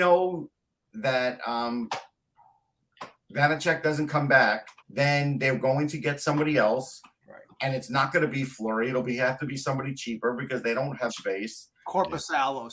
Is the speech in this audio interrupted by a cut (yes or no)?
yes